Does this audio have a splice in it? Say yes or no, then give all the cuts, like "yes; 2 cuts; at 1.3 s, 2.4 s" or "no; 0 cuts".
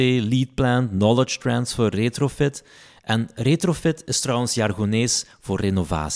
no; 0 cuts